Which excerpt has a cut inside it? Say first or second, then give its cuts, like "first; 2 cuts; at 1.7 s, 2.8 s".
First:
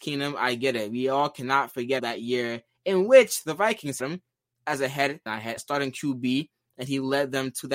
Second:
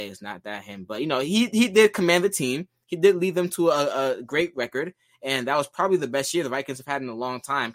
first; 4 cuts; at 2.0 s, 4.0 s, 5.3 s, 5.6 s